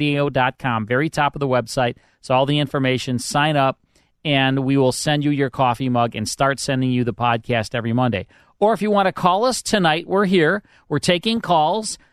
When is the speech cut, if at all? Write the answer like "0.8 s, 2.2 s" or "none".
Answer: none